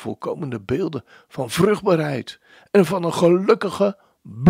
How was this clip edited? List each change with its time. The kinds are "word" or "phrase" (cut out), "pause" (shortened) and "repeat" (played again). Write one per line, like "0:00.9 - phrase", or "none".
none